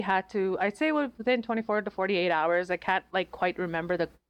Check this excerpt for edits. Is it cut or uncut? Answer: uncut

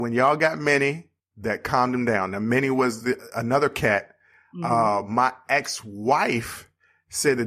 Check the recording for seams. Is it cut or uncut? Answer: uncut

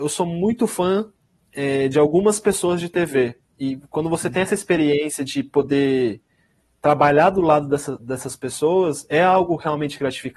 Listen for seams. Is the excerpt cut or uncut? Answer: uncut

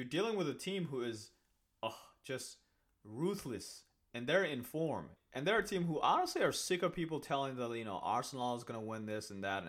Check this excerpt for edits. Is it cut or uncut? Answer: uncut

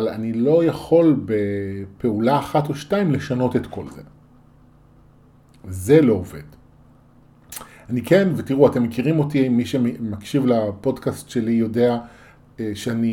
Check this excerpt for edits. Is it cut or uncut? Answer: uncut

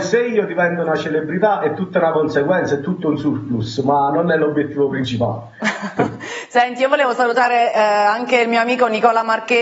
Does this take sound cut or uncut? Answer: uncut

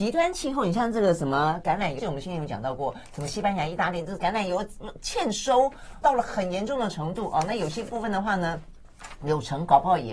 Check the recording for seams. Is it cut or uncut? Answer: cut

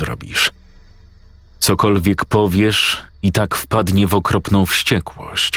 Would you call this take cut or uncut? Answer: uncut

